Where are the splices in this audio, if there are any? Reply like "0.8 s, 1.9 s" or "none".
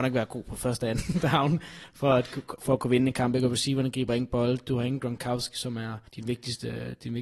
6.1 s

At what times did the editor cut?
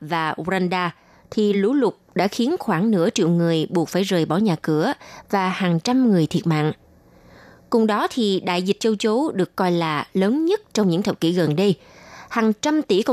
none

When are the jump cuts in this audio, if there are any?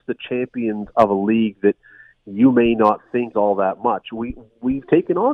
3.3 s

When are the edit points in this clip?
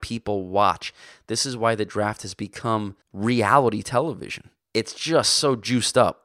3.0 s, 4.6 s

